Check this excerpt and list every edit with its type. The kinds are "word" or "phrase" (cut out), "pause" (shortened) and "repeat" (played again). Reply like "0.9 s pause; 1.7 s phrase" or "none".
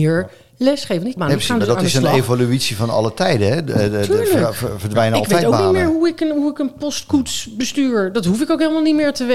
1.2 s phrase